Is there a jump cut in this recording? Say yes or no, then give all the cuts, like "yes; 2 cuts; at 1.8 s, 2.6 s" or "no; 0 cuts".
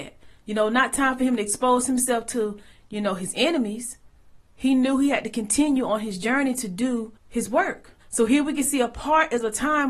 yes; 2 cuts; at 7.2 s, 8.0 s